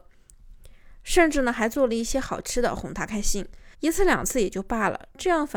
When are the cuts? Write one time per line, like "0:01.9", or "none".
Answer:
0:03.7